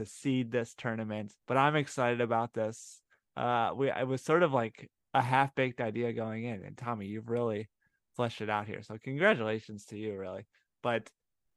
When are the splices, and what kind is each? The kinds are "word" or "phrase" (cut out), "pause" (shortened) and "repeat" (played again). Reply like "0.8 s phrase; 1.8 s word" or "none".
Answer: 1.4 s pause